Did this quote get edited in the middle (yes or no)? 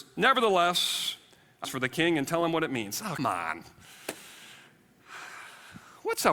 yes